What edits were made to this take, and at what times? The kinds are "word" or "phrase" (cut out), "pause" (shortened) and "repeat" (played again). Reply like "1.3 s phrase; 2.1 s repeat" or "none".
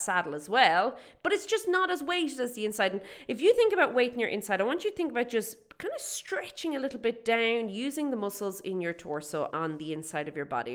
9.5 s word